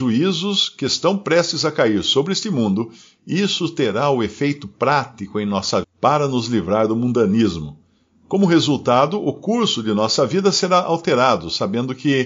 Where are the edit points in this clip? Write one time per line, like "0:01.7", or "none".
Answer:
0:05.8

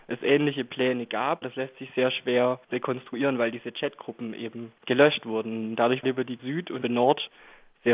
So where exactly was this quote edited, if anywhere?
0:01.4
0:02.6
0:04.8
0:06.0
0:06.4
0:06.8

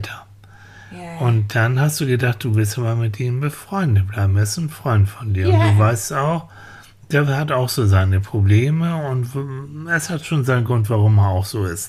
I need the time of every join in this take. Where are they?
none

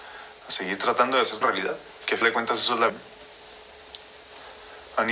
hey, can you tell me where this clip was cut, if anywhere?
0:01.4
0:02.2
0:02.9

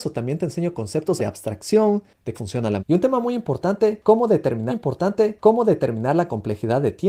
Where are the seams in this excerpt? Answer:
0:01.2
0:02.3
0:02.8
0:04.7

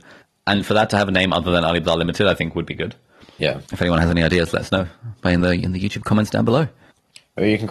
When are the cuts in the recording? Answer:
0:03.7

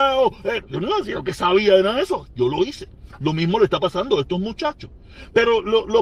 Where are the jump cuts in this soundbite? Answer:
none

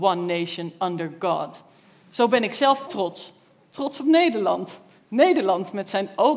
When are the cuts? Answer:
0:02.9

